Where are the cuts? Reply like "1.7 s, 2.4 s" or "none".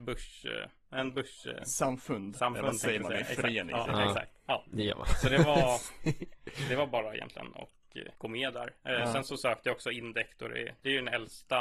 8.1 s